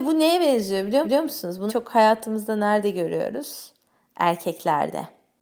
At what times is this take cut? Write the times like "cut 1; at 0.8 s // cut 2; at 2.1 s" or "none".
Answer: cut 1; at 1.0 s // cut 2; at 1.7 s